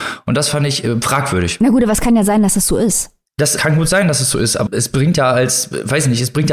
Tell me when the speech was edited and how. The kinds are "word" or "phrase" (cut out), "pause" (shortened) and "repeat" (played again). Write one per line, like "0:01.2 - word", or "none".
0:03.6 - word
0:04.7 - word